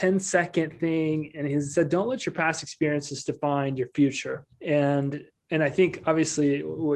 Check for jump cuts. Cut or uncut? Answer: cut